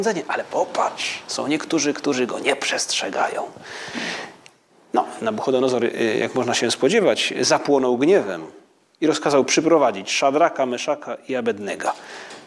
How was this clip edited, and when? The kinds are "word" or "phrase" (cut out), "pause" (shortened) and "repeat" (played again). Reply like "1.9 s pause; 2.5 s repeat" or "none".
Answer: none